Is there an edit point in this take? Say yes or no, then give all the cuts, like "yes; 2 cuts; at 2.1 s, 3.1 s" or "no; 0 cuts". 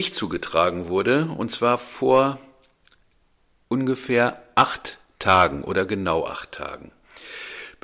no; 0 cuts